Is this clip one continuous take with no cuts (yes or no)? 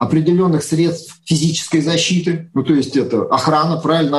yes